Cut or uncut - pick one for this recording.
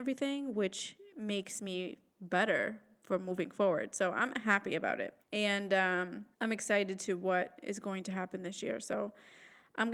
cut